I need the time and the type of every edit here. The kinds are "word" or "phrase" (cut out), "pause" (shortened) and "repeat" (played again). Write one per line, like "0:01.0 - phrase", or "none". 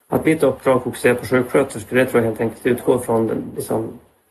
none